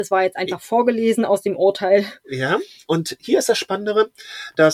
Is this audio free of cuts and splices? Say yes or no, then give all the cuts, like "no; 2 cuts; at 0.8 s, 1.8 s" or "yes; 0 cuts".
yes; 0 cuts